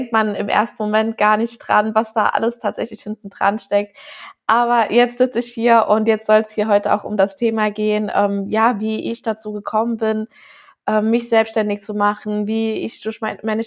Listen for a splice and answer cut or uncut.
uncut